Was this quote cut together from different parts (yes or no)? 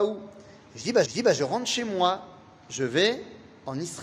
yes